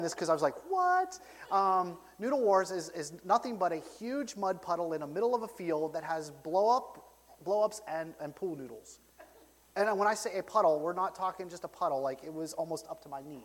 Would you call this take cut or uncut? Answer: uncut